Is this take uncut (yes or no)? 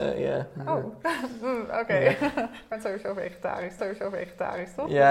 no